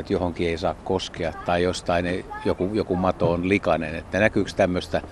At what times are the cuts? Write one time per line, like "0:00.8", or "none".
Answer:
none